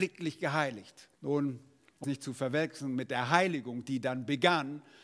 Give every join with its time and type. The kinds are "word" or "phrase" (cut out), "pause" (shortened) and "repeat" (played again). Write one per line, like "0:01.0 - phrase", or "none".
0:01.2 - pause
0:02.0 - word